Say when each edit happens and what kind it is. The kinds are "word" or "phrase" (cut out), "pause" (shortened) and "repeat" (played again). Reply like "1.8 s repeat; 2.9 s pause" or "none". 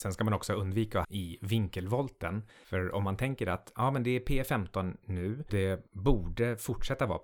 1.0 s word; 5.5 s word